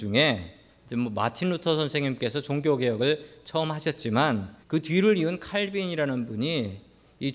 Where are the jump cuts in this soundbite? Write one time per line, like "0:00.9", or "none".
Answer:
0:04.6